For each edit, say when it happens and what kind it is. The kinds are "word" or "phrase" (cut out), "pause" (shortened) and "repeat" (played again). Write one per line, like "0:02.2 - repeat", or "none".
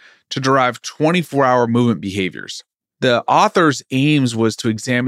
none